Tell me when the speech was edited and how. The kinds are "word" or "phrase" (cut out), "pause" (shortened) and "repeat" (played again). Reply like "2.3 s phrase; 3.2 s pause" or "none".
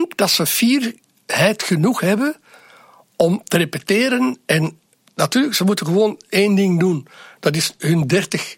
none